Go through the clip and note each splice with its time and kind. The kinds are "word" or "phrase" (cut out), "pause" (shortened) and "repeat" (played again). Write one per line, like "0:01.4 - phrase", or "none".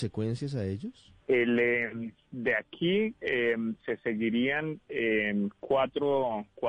0:01.2 - pause